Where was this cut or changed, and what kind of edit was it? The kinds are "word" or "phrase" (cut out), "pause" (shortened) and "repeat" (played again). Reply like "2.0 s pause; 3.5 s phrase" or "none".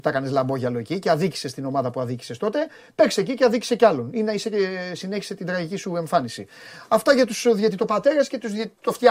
none